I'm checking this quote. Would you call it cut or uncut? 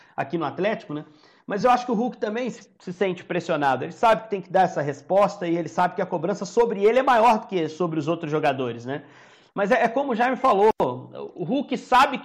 uncut